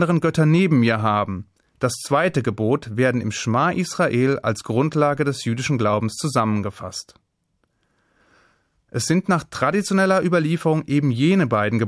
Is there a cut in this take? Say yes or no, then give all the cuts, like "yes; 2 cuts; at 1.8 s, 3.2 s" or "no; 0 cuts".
no; 0 cuts